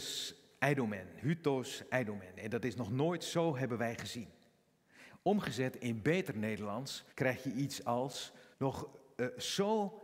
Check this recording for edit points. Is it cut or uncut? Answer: cut